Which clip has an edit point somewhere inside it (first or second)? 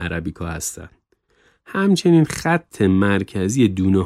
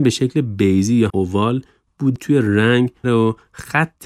second